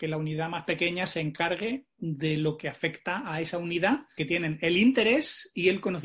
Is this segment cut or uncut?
cut